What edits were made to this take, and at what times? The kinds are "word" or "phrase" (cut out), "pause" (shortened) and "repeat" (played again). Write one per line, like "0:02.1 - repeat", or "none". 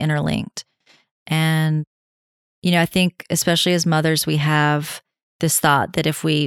none